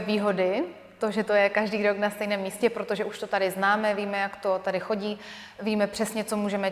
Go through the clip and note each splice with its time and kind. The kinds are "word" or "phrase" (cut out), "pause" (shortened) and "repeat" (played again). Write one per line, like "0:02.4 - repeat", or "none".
none